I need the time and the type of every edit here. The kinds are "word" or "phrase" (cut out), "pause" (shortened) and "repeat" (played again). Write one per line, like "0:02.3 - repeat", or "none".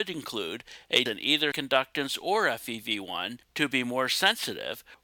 0:01.1 - word
0:01.5 - word